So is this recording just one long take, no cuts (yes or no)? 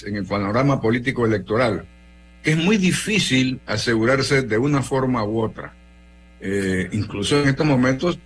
yes